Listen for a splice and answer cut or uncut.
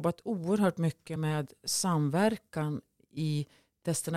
uncut